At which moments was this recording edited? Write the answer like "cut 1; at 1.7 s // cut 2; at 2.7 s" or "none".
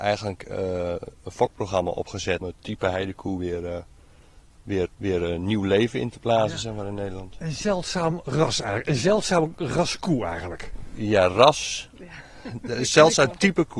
cut 1; at 2.4 s // cut 2; at 4.9 s

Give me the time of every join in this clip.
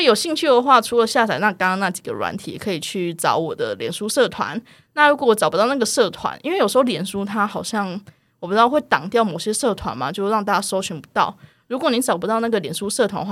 none

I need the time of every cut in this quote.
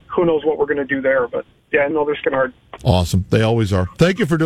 cut 1; at 1.5 s // cut 2; at 1.9 s // cut 3; at 2.2 s

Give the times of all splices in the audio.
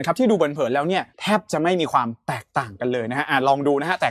cut 1; at 1.1 s

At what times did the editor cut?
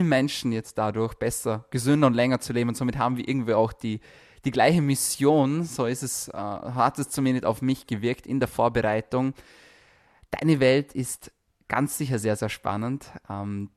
none

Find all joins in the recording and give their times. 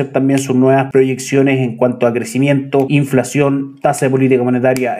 none

